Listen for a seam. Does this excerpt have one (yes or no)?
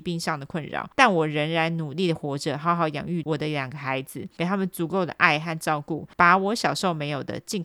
no